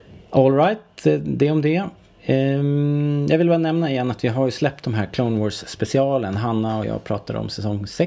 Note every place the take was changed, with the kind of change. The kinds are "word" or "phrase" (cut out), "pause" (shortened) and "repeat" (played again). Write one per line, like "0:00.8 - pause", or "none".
none